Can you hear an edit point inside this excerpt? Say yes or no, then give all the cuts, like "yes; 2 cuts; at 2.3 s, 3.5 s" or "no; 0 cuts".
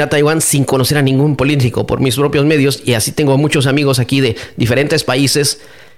no; 0 cuts